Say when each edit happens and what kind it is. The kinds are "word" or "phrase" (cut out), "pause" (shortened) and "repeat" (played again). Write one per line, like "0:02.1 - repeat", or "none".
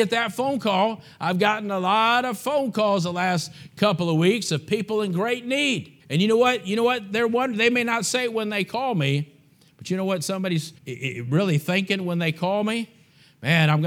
0:06.0 - pause
0:10.8 - pause